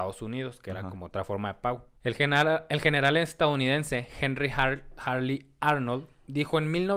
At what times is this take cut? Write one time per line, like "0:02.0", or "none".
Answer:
0:02.0